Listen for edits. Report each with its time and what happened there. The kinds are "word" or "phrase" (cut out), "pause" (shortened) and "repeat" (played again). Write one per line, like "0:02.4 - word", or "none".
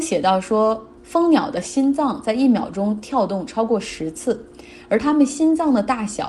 0:01.0 - pause